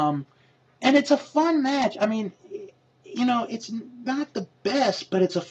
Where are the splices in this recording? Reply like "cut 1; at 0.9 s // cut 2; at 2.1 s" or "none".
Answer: none